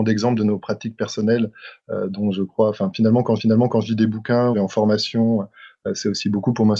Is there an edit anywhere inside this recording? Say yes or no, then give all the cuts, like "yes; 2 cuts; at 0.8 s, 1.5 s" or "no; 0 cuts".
yes; 2 cuts; at 3.4 s, 4.5 s